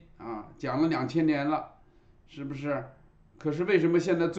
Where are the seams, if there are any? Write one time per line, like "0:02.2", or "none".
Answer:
none